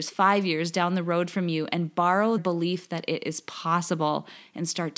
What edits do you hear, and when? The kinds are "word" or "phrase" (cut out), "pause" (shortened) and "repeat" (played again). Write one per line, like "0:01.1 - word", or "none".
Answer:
0:02.4 - word